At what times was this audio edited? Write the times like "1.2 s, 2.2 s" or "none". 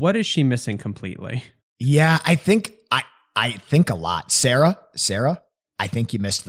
none